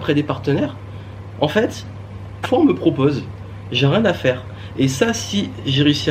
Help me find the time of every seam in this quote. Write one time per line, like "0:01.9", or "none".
0:02.4